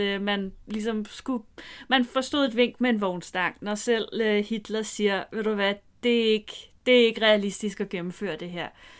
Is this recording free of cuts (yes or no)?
yes